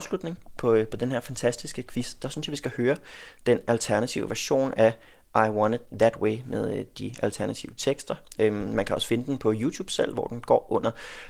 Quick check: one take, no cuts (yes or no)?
yes